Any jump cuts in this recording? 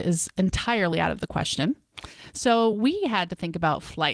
no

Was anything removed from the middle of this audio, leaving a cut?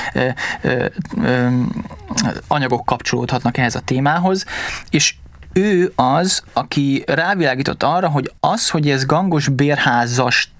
yes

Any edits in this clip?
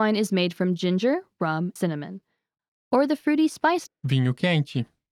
yes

